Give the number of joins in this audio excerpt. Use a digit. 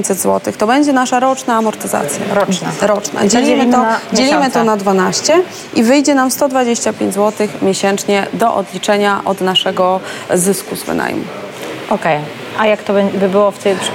0